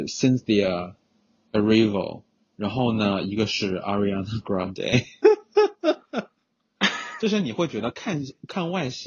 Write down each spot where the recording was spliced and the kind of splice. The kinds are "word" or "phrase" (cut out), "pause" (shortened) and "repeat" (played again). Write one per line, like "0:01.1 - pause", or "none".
0:02.4 - pause